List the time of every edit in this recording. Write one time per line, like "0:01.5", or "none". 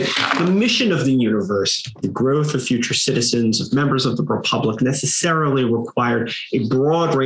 0:02.0